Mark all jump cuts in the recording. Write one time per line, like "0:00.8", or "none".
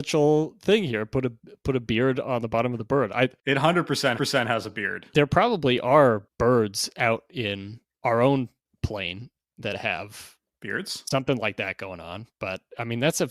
0:04.1